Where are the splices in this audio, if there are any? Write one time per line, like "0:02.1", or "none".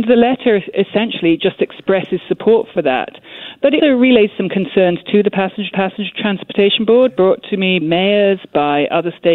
0:03.8
0:05.7
0:07.8